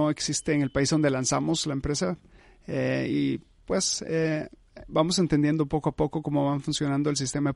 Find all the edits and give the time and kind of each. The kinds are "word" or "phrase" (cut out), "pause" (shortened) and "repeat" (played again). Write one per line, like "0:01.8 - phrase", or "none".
none